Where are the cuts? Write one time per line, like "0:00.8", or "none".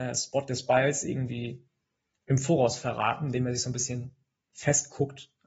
none